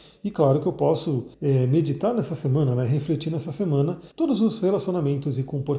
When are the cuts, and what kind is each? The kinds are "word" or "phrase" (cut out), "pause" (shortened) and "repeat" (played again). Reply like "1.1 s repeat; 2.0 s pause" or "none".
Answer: 1.3 s pause; 4.1 s pause